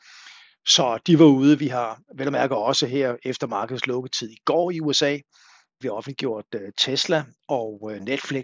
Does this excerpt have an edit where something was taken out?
yes; 1 cut; at 5.8 s

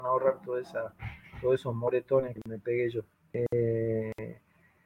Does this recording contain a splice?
yes; 1 cut; at 3.1 s

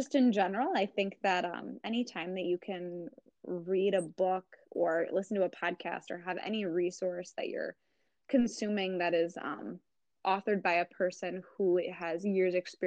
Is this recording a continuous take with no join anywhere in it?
yes; 0 cuts

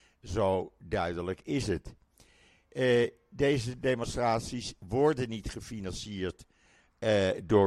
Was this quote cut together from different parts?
no; 0 cuts

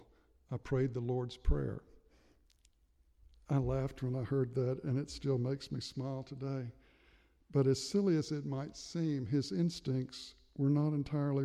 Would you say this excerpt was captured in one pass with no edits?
yes; 0 cuts

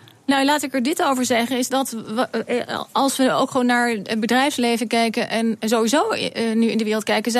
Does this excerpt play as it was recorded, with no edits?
yes; 0 cuts

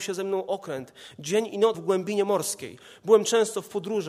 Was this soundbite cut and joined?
yes; 1 cut; at 1.7 s

